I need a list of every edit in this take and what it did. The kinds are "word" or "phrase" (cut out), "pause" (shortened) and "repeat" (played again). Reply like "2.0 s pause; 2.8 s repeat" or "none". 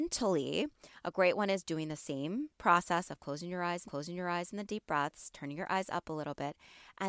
3.9 s repeat